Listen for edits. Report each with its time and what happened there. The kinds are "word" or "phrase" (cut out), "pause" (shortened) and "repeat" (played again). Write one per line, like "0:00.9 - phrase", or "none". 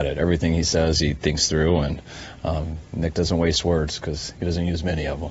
none